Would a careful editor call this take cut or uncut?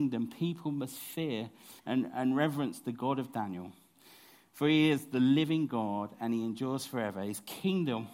cut